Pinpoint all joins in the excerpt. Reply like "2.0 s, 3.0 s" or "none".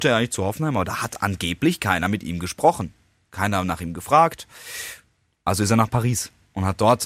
none